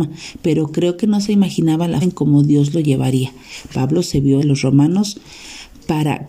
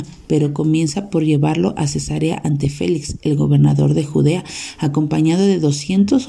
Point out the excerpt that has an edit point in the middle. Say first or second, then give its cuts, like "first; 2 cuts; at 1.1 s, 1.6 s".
first; 2 cuts; at 2.0 s, 4.4 s